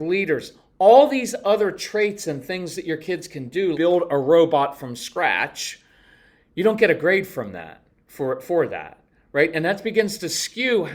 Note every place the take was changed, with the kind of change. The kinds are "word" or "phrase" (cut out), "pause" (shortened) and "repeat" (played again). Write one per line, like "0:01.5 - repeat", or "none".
0:03.7 - word